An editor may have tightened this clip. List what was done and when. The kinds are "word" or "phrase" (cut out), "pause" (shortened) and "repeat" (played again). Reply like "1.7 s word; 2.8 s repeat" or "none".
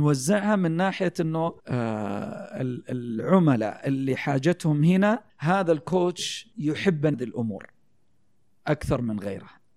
1.6 s pause; 5.3 s pause; 6.5 s pause; 7.1 s word